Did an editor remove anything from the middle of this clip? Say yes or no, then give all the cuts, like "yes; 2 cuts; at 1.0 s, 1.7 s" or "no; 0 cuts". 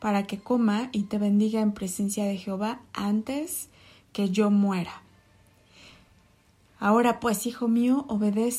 no; 0 cuts